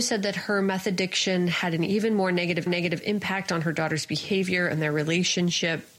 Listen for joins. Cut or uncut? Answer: cut